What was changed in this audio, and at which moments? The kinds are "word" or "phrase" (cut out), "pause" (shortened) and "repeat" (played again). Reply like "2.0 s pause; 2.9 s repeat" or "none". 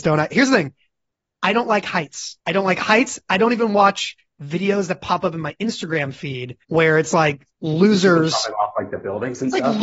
2.4 s pause; 6.6 s pause; 7.5 s pause